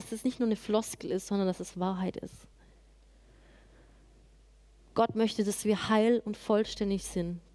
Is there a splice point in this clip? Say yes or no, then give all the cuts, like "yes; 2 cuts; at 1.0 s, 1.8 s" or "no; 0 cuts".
no; 0 cuts